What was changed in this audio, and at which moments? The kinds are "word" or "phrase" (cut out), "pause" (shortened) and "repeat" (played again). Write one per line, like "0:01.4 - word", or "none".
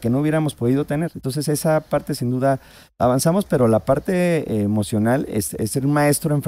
none